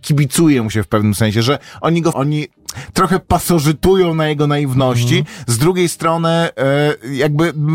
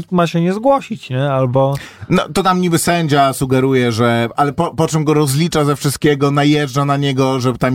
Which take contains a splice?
first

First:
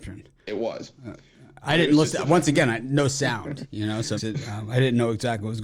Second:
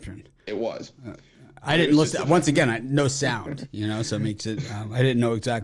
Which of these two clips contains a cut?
first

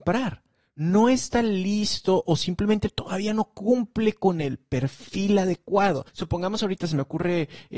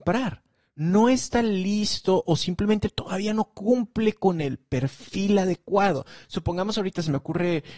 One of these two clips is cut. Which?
first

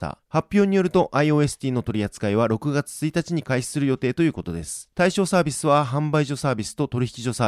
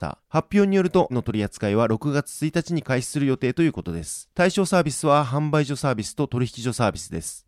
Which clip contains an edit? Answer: second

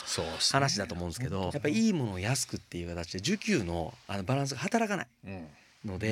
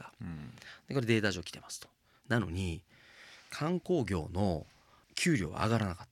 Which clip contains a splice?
first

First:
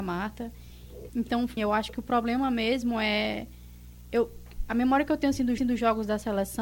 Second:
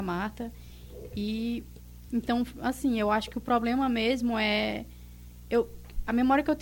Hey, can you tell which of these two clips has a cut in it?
first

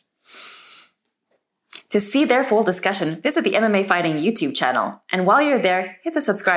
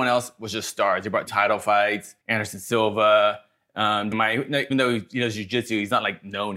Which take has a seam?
second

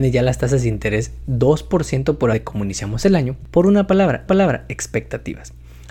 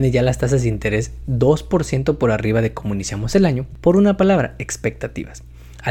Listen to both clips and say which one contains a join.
first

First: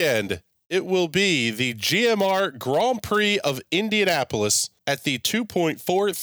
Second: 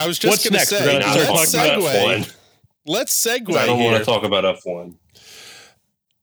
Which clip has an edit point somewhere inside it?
first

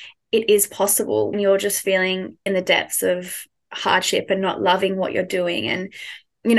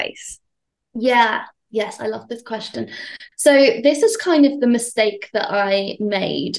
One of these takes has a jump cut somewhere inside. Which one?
first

